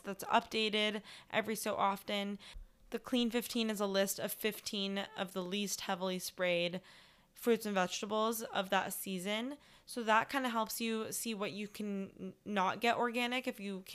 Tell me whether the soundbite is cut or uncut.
uncut